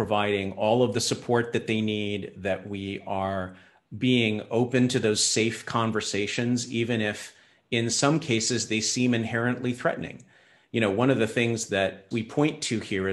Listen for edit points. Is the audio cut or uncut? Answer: uncut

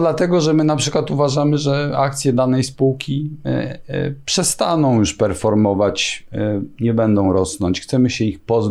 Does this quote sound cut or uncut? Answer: uncut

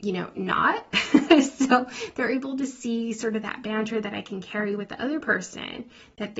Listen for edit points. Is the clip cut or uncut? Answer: uncut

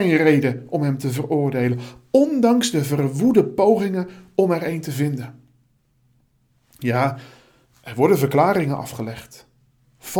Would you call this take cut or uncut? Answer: uncut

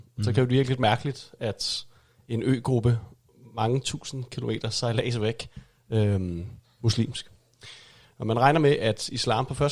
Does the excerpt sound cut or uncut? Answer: cut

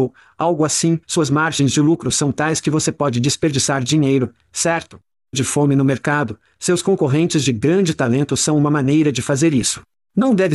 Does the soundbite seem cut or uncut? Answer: cut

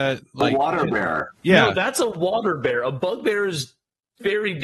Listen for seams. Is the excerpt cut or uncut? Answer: uncut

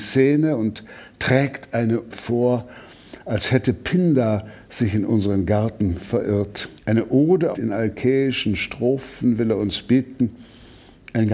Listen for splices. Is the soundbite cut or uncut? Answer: cut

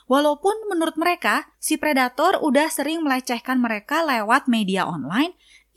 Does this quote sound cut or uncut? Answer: cut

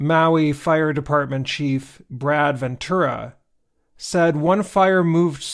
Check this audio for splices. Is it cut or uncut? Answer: uncut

